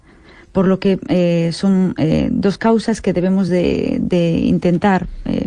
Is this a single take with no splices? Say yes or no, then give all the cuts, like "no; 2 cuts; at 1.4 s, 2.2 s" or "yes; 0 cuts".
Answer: yes; 0 cuts